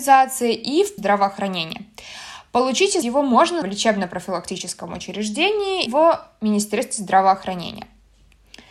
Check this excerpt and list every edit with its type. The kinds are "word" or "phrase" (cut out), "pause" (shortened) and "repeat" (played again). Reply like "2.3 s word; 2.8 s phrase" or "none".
1.0 s phrase; 3.0 s word; 3.6 s word; 5.9 s word